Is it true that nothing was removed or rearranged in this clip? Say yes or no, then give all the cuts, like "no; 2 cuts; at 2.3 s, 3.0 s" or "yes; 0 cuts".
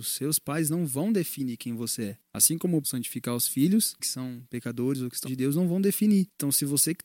no; 3 cuts; at 2.8 s, 4.0 s, 5.2 s